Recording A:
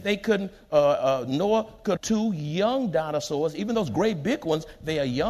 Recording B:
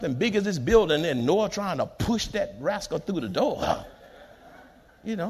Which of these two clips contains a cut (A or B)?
A